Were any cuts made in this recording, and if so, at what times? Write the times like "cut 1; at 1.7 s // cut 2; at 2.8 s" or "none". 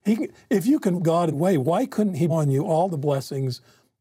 cut 1; at 1.0 s // cut 2; at 1.3 s // cut 3; at 2.3 s